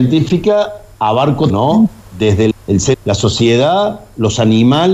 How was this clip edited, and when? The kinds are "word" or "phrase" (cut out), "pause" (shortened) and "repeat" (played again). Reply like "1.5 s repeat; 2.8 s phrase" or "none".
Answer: 1.5 s word; 2.5 s word; 2.9 s word